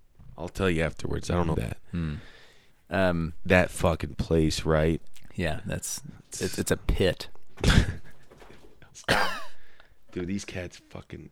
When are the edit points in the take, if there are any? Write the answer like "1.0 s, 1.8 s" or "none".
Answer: 1.5 s, 2.7 s, 8.9 s